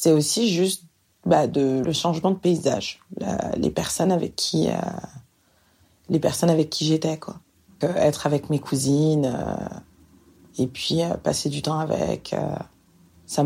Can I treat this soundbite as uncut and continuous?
no; 2 cuts; at 1.8 s, 7.8 s

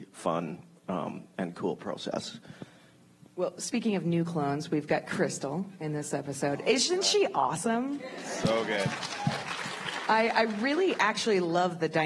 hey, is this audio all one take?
yes; 0 cuts

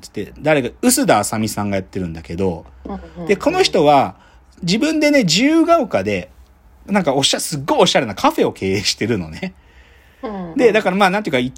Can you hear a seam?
no; 0 cuts

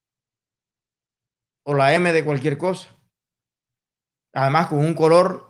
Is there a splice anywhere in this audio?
no; 0 cuts

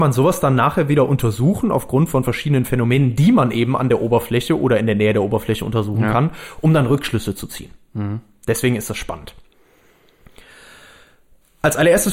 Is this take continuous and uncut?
yes; 0 cuts

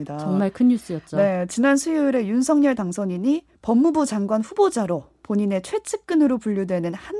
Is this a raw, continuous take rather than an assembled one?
yes; 0 cuts

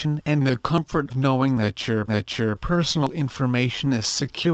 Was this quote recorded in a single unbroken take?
no; 2 cuts; at 1.1 s, 2.1 s

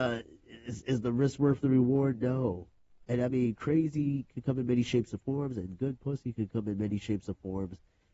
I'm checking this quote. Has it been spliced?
no; 0 cuts

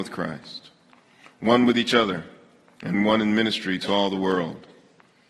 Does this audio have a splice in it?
no; 0 cuts

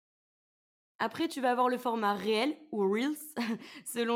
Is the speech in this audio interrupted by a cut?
no; 0 cuts

